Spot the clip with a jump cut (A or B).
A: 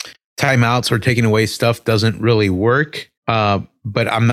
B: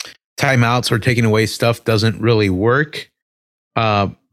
A